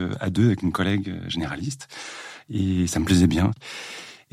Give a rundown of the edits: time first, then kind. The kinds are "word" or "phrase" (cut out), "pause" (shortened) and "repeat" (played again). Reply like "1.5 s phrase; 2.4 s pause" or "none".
none